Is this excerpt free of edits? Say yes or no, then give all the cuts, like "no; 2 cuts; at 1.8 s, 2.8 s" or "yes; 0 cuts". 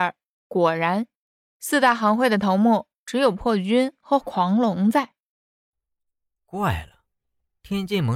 yes; 0 cuts